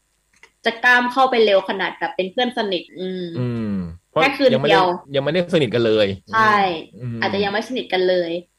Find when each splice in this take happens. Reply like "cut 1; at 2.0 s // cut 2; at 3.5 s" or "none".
cut 1; at 2.9 s // cut 2; at 5.1 s // cut 3; at 6.2 s